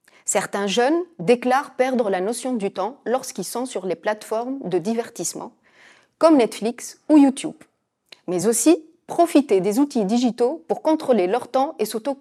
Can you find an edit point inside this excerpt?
no; 0 cuts

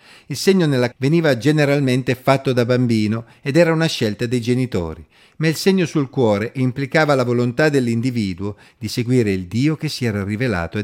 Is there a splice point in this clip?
yes; 1 cut; at 0.9 s

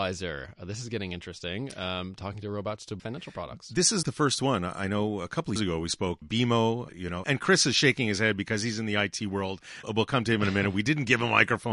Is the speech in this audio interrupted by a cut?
yes; 7 cuts; at 3.0 s, 4.0 s, 5.6 s, 6.2 s, 6.9 s, 7.2 s, 9.8 s

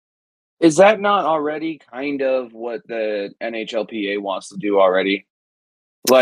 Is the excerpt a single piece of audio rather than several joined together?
yes; 0 cuts

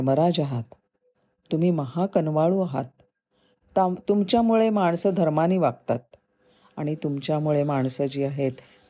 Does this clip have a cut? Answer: no; 0 cuts

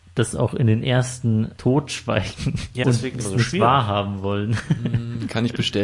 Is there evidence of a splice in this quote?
yes; 3 cuts; at 1.6 s, 2.8 s, 3.2 s

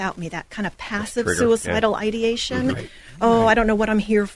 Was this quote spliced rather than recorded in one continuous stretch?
no; 0 cuts

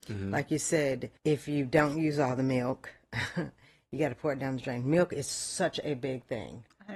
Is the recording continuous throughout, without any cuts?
no; 1 cut; at 1.2 s

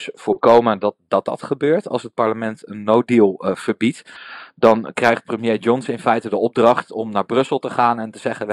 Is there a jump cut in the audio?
no; 0 cuts

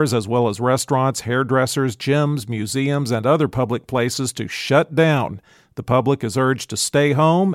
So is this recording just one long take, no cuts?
yes; 0 cuts

